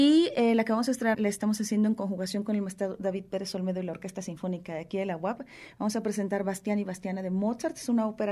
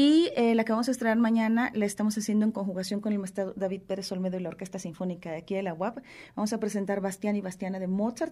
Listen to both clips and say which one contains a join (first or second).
first